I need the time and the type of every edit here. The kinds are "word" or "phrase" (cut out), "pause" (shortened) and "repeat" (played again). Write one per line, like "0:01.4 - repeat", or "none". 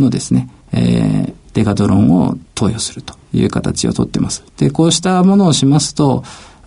0:04.5 - pause